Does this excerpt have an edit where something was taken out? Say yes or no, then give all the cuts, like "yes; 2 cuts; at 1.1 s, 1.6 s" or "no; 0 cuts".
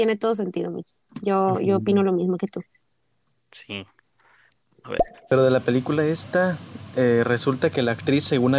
no; 0 cuts